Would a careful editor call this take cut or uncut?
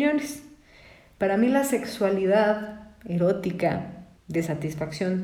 cut